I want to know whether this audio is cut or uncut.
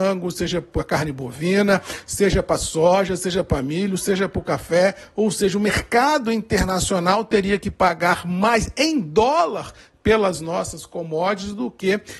uncut